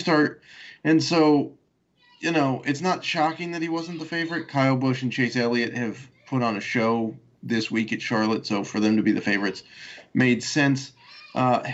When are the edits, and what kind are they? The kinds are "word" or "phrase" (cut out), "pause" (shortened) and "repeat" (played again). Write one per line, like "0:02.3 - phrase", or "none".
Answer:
none